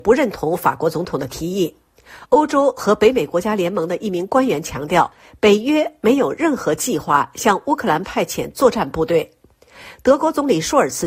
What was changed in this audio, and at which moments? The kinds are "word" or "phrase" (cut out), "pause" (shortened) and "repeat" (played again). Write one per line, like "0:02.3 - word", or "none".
none